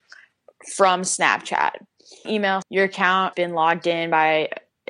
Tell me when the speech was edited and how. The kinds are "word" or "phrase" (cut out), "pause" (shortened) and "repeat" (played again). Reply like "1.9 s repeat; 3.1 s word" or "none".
2.3 s word; 2.6 s word; 3.3 s word